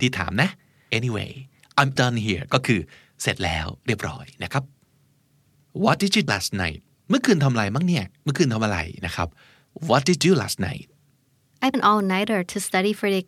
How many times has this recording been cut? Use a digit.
5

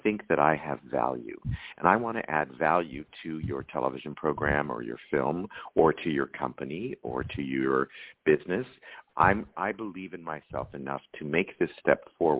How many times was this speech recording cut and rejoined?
1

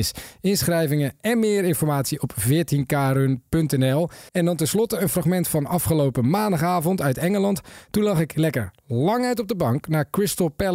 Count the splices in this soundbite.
1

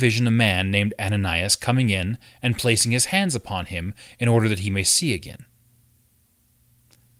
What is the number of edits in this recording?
0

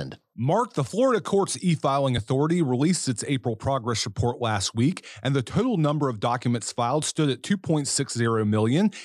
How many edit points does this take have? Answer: 0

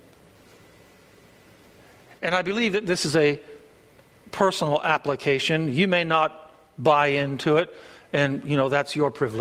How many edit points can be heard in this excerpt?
0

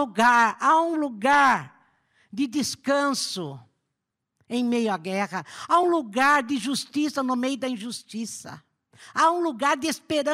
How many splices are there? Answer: 0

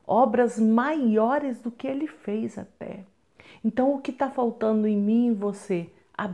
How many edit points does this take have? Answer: 0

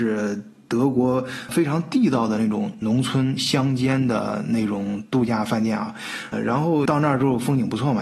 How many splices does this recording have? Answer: 4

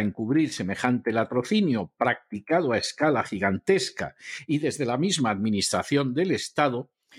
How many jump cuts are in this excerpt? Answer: 0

